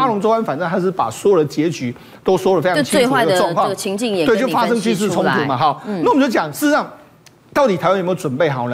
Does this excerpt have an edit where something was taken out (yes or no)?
no